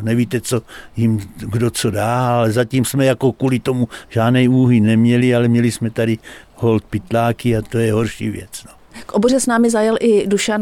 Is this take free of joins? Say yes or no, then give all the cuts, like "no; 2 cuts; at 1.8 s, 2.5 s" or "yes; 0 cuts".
yes; 0 cuts